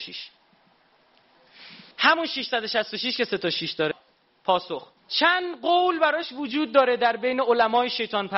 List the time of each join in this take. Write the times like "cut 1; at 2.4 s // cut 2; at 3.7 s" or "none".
cut 1; at 1.9 s // cut 2; at 5.0 s